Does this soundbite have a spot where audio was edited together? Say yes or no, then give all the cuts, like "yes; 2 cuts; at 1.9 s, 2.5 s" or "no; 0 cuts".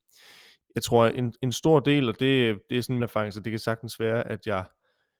yes; 1 cut; at 3.0 s